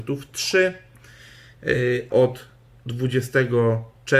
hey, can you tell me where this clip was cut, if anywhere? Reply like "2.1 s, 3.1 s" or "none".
2.1 s

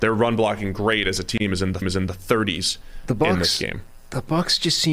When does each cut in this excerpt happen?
1.8 s

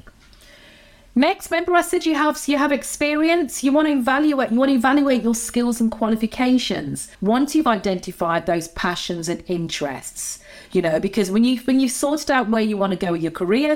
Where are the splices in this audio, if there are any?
7.1 s

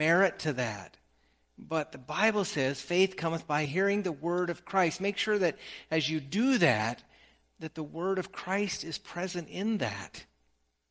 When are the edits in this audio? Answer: 3.6 s

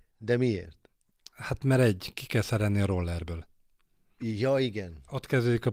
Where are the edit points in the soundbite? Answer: none

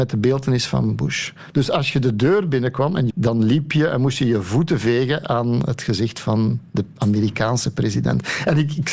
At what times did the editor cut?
3.1 s

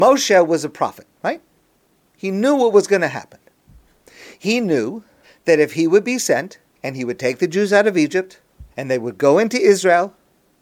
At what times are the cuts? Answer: 1.1 s, 5.2 s, 6.8 s, 8.7 s

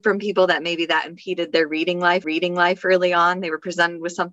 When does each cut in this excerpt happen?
2.2 s

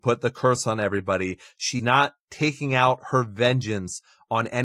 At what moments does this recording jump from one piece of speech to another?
1.8 s

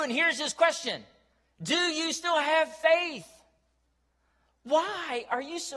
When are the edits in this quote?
none

